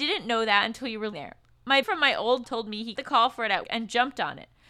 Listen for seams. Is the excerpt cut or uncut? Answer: cut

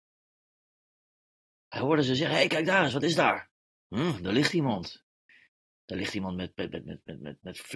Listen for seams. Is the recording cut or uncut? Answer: uncut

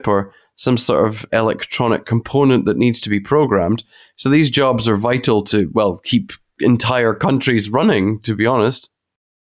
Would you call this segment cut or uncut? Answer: uncut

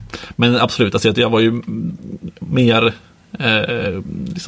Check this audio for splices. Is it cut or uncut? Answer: uncut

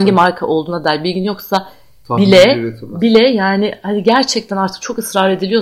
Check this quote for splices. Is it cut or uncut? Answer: uncut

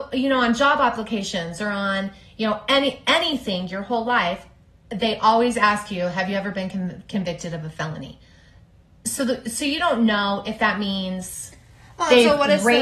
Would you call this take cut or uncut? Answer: uncut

